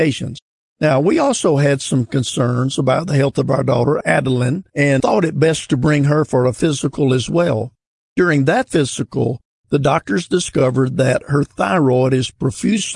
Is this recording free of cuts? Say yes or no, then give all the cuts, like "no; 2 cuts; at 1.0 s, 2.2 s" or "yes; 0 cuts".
yes; 0 cuts